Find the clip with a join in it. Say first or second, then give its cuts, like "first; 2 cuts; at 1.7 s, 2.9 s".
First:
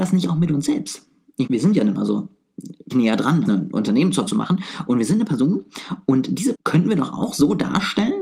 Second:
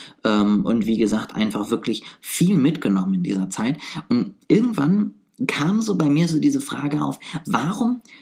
first; 6 cuts; at 1.5 s, 1.9 s, 2.9 s, 3.5 s, 4.3 s, 6.5 s